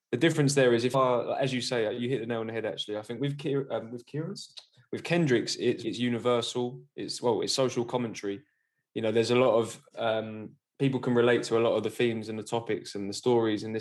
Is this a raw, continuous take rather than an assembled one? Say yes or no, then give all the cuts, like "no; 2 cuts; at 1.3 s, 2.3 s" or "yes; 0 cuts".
no; 2 cuts; at 0.9 s, 5.8 s